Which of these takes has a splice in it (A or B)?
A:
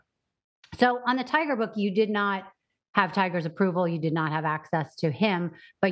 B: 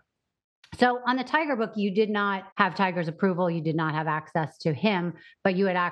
B